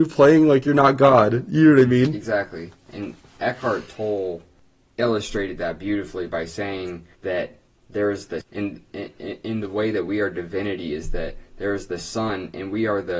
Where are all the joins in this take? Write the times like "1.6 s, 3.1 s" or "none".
7.1 s, 8.4 s